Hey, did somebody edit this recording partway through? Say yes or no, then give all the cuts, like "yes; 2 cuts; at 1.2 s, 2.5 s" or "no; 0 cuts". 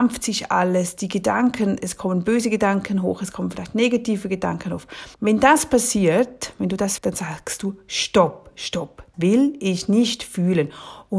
yes; 3 cuts; at 5.1 s, 7.0 s, 9.1 s